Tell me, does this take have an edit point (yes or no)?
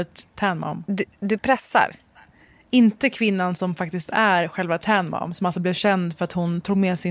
no